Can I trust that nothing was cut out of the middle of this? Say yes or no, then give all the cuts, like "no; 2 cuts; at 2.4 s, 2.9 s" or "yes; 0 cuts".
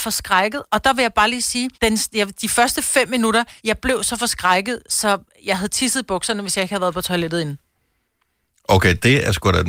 no; 2 cuts; at 1.7 s, 3.6 s